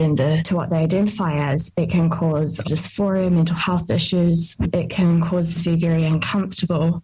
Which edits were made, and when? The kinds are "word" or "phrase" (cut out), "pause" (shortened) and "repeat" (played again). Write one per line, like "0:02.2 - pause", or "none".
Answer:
0:02.6 - phrase
0:05.5 - word